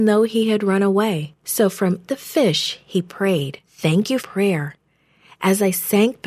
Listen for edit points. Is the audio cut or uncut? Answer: cut